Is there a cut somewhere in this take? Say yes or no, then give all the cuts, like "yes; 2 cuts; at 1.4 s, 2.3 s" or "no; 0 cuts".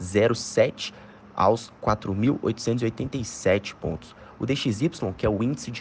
no; 0 cuts